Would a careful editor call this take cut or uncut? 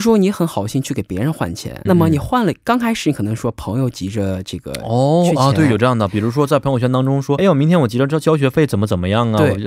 cut